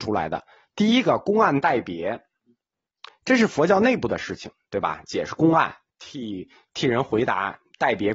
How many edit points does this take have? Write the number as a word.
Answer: one